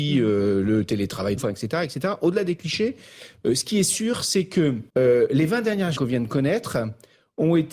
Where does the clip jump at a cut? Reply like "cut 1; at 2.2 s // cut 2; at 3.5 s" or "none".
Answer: cut 1; at 1.4 s // cut 2; at 4.9 s // cut 3; at 6.0 s

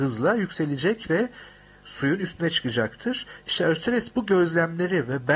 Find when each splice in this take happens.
none

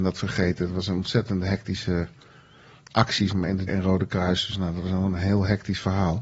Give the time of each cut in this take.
cut 1; at 3.3 s // cut 2; at 3.7 s

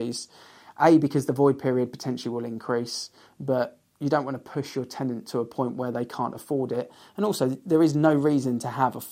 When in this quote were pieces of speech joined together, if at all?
none

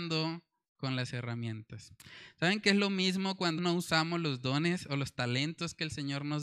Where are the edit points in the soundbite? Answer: cut 1; at 3.6 s

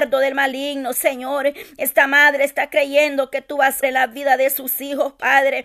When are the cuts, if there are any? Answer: cut 1; at 3.8 s

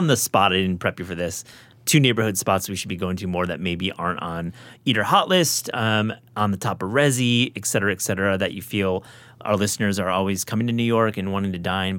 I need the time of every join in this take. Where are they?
none

